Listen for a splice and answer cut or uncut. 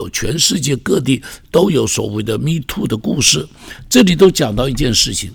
uncut